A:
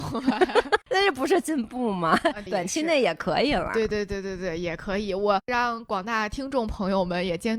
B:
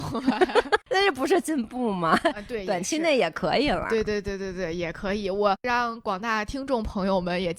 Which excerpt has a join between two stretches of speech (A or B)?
A